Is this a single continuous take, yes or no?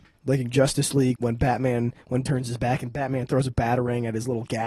no